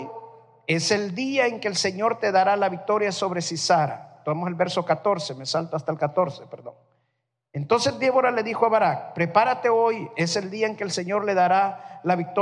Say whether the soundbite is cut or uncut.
uncut